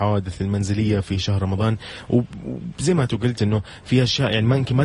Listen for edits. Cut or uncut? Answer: cut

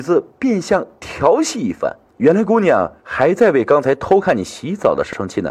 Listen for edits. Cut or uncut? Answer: cut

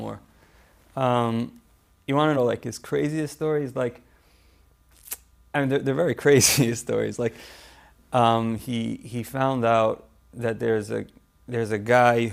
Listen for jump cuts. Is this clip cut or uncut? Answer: uncut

